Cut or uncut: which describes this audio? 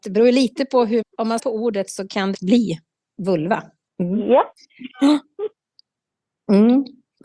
cut